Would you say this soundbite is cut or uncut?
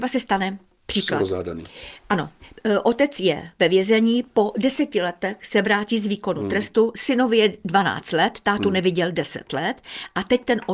uncut